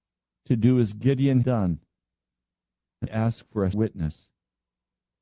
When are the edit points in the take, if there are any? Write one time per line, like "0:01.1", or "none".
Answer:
0:01.4
0:03.1
0:03.7